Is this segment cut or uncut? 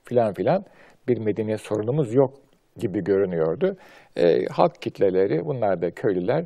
uncut